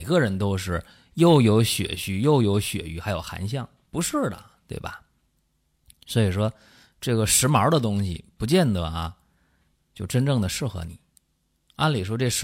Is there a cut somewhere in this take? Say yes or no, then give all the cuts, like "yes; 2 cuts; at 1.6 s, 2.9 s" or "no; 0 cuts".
no; 0 cuts